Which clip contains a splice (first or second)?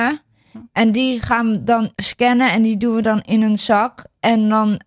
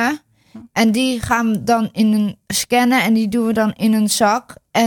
first